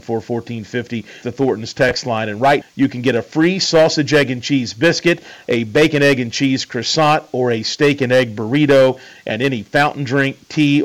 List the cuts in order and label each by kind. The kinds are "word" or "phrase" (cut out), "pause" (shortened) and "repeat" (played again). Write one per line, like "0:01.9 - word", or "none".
0:01.2 - word
0:02.6 - word